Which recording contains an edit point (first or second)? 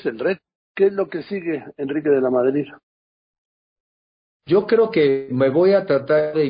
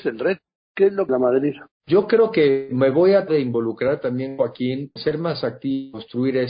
second